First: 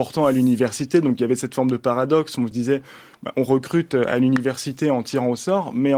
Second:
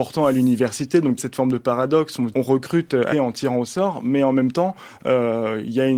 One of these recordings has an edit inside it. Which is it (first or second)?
second